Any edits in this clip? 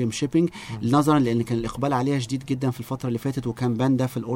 no; 0 cuts

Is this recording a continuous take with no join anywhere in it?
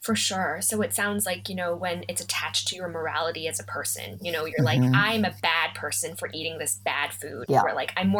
yes; 0 cuts

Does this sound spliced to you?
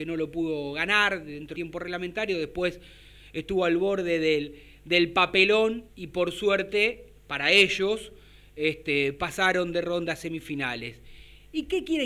yes; 2 cuts; at 1.5 s, 5.9 s

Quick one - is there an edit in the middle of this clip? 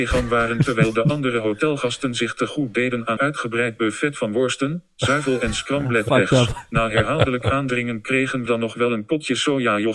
yes; 2 cuts; at 3.2 s, 8.5 s

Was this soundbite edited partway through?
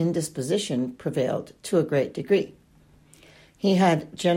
no; 0 cuts

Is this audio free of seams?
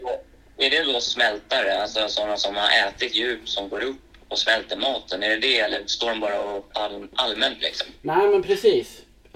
no; 1 cut; at 6.7 s

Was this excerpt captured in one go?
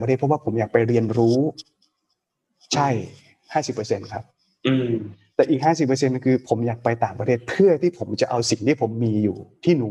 yes; 0 cuts

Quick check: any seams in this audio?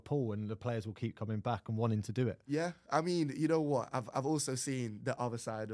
no; 0 cuts

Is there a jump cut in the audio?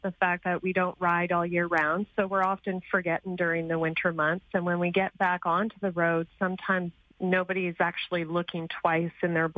no; 0 cuts

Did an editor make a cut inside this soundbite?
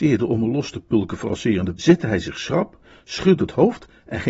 yes; 3 cuts; at 1.3 s, 1.7 s, 3.4 s

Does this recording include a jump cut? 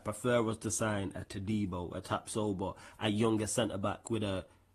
no; 0 cuts

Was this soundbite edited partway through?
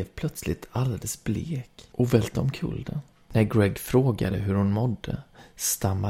no; 0 cuts

